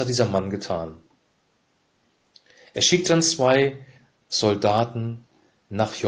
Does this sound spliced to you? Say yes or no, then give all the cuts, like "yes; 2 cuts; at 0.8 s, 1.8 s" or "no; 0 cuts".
no; 0 cuts